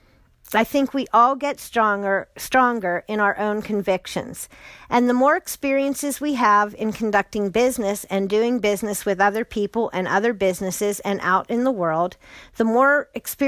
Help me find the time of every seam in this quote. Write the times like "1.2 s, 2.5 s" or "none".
none